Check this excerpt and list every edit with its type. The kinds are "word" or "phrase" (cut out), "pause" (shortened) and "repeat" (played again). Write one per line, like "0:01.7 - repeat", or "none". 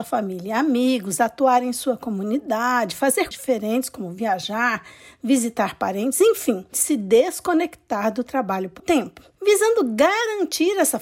0:03.3 - word
0:06.7 - word
0:08.8 - word